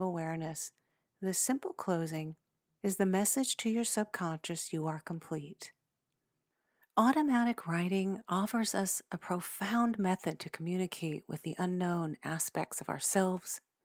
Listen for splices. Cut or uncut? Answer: uncut